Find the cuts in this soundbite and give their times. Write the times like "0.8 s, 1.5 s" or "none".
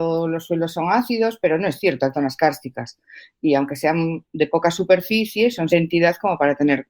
2.1 s, 5.7 s